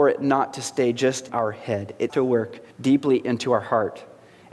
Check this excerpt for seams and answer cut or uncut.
cut